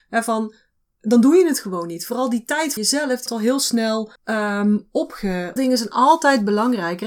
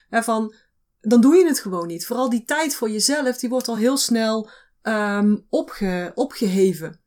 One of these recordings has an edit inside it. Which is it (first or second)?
first